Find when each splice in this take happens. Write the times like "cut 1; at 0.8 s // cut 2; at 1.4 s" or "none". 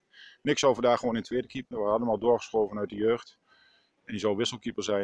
none